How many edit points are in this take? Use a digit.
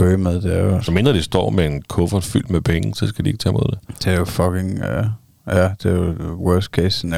0